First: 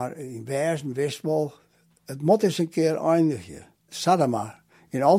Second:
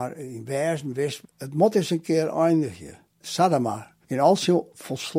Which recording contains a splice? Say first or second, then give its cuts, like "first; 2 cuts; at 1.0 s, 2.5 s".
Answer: second; 2 cuts; at 1.2 s, 4.0 s